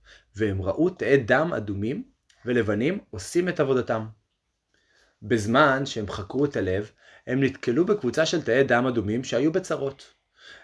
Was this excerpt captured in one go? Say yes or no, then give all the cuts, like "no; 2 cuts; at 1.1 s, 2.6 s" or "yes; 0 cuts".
yes; 0 cuts